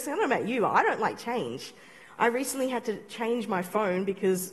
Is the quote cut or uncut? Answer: uncut